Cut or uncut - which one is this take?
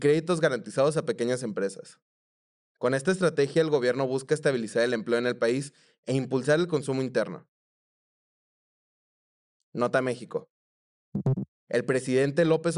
uncut